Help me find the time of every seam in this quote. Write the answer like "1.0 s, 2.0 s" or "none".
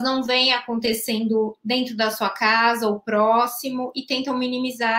none